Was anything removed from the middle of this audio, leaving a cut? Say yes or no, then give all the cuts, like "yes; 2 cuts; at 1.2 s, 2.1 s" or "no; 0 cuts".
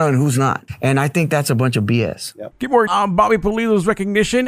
yes; 1 cut; at 2.9 s